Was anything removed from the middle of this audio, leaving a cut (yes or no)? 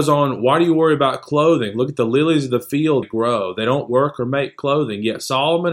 yes